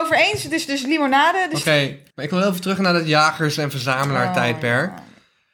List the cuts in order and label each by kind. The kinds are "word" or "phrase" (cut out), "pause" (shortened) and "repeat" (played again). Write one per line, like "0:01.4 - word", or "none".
0:02.1 - pause